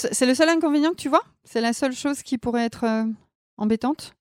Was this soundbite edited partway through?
no; 0 cuts

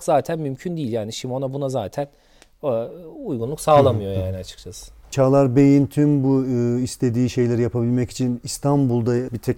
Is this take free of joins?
yes; 0 cuts

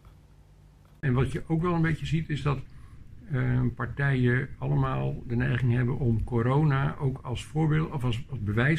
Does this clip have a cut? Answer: no; 0 cuts

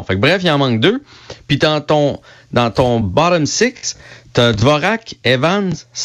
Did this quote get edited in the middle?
no; 0 cuts

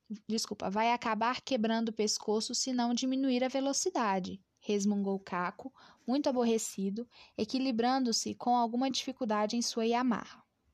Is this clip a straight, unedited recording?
yes; 0 cuts

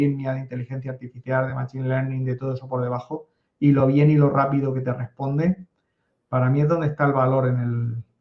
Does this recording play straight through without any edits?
yes; 0 cuts

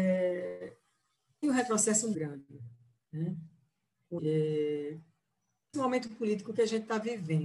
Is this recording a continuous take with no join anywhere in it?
no; 4 cuts; at 1.4 s, 2.1 s, 4.2 s, 5.7 s

